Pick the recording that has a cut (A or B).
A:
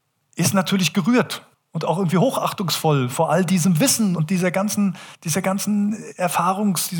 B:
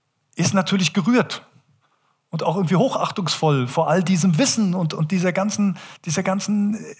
A